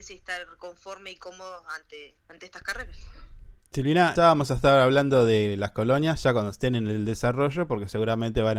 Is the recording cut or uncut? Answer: cut